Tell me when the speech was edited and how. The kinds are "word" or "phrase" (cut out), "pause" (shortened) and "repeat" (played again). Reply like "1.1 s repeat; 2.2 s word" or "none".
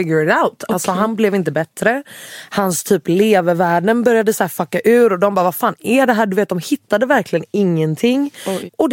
none

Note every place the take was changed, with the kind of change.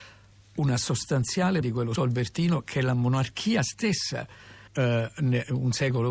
1.6 s word; 2.0 s word; 4.7 s word

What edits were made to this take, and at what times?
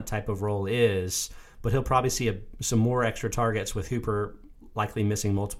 none

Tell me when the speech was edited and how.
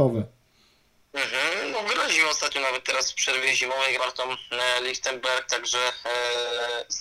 4.0 s phrase

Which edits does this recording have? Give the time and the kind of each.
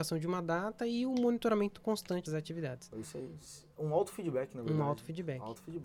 2.3 s phrase

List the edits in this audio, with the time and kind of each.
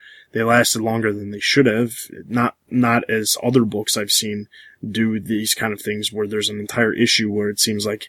none

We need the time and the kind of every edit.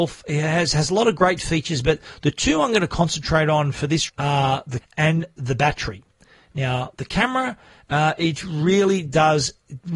4.1 s word; 4.8 s word

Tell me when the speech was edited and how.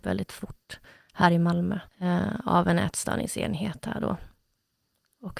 1.9 s pause

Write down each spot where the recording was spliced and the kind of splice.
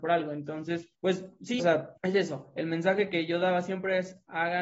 0.9 s pause; 1.6 s word; 2.0 s pause

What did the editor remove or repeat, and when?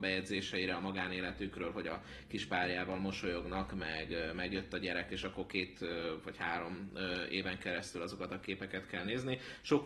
none

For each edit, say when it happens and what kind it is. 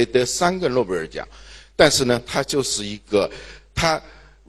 none

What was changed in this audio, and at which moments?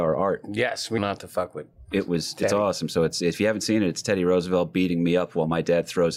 1.0 s word

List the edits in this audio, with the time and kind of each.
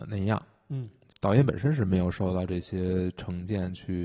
none

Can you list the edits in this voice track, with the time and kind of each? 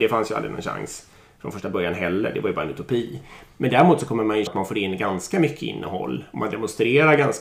4.5 s word

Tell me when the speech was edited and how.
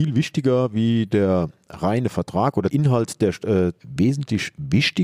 2.7 s word; 3.8 s phrase

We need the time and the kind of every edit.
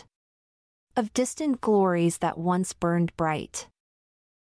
none

